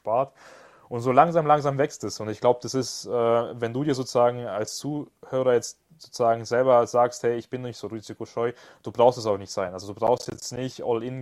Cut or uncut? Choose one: uncut